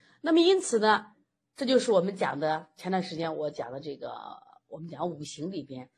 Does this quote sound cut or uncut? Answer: uncut